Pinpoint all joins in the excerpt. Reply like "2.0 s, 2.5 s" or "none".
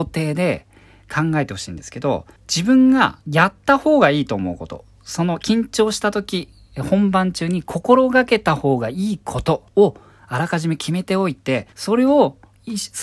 2.4 s, 3.2 s, 9.7 s, 11.7 s